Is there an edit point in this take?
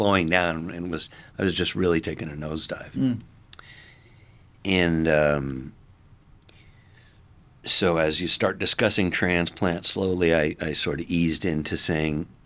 no; 0 cuts

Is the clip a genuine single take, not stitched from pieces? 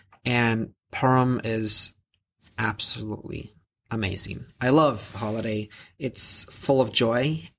yes; 0 cuts

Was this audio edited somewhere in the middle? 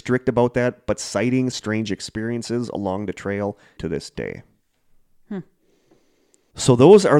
yes; 2 cuts; at 1.5 s, 3.8 s

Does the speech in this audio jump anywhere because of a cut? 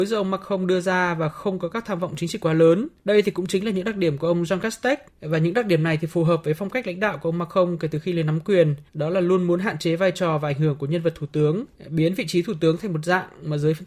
yes; 4 cuts; at 3.0 s, 5.1 s, 8.9 s, 11.8 s

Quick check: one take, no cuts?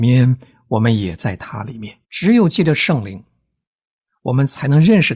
no; 1 cut; at 2.0 s

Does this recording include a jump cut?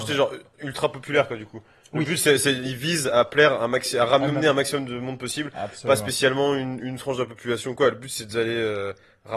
no; 0 cuts

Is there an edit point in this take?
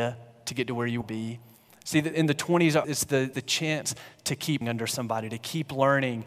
yes; 5 cuts; at 1.0 s, 2.1 s, 2.8 s, 3.3 s, 4.6 s

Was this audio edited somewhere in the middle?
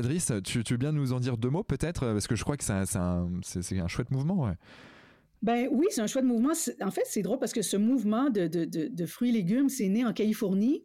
no; 0 cuts

